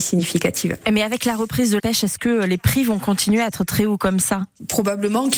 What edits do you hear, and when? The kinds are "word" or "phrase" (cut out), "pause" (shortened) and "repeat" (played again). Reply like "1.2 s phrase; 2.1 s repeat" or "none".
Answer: 1.8 s word